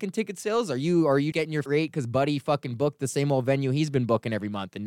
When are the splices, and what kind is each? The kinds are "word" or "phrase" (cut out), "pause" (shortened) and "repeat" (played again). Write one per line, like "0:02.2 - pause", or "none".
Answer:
0:01.3 - word
0:01.7 - word